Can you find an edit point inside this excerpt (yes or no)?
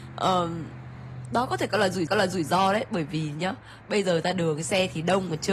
yes